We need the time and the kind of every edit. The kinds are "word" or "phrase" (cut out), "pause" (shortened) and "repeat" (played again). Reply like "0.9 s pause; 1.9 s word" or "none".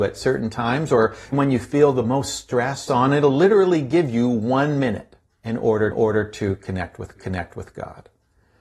1.3 s word; 2.9 s phrase; 5.3 s pause; 5.9 s repeat; 7.1 s repeat

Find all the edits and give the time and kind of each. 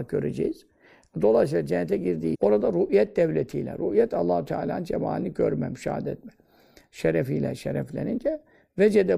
2.3 s word

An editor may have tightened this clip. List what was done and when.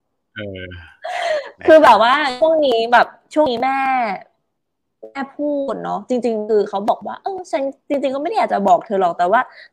none

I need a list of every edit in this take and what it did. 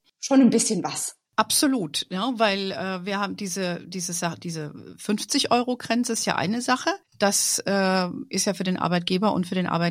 1.3 s pause; 7.1 s pause

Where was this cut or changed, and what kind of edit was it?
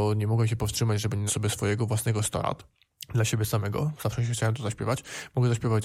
1.3 s word

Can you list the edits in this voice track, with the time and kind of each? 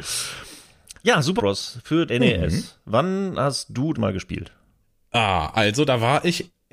1.0 s word; 1.4 s word; 2.1 s word; 3.9 s phrase; 4.8 s pause

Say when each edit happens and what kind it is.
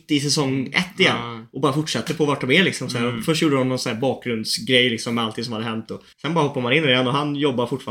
6.1 s pause

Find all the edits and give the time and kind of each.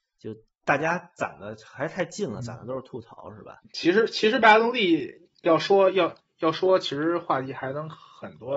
3.6 s pause; 5.3 s pause

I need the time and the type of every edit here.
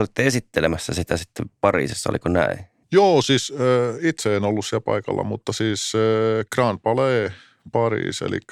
2.8 s pause

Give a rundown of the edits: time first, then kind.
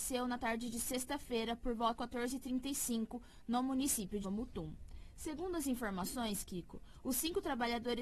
2.0 s word; 4.2 s word

